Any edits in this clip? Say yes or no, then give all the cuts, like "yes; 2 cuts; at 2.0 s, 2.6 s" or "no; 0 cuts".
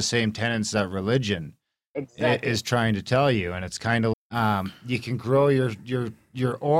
yes; 1 cut; at 4.1 s